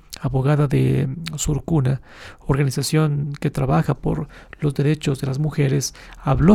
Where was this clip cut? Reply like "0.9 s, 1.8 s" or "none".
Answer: none